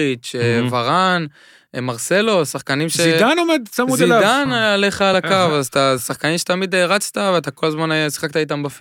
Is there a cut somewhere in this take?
no; 0 cuts

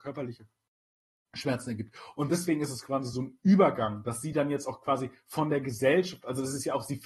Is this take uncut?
yes; 0 cuts

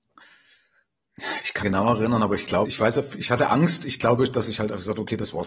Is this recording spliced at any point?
yes; 2 cuts; at 1.6 s, 2.7 s

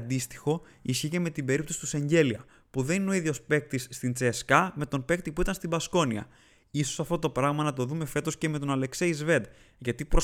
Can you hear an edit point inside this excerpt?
no; 0 cuts

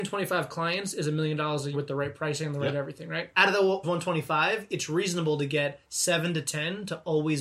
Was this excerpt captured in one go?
no; 2 cuts; at 1.7 s, 3.8 s

